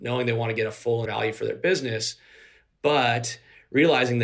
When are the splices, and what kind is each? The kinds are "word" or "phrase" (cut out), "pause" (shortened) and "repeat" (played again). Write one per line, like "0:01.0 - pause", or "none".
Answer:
0:01.0 - phrase